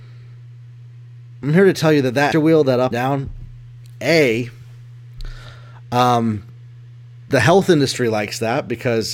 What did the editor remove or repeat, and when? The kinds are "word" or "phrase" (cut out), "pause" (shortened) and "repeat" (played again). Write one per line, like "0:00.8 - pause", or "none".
0:02.3 - word
0:02.9 - word